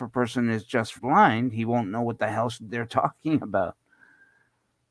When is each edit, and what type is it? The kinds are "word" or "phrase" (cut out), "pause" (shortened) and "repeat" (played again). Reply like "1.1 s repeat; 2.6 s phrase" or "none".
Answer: 1.0 s word